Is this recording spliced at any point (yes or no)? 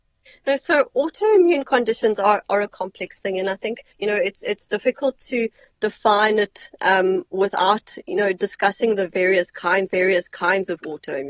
yes